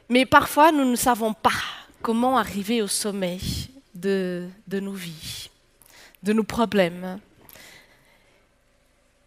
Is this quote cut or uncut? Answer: uncut